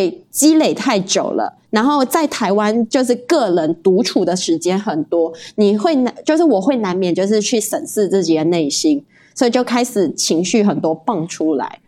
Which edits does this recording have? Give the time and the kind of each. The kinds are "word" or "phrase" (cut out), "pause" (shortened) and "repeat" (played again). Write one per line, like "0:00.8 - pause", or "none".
none